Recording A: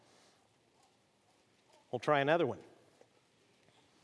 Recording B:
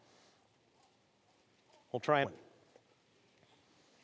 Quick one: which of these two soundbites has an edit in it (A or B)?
B